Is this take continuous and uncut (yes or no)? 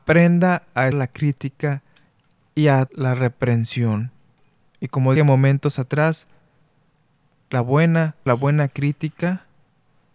no